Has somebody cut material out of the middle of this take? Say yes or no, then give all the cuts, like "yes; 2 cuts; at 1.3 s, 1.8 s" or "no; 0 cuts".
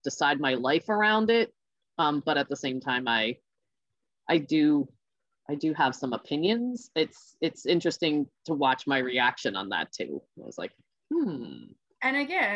no; 0 cuts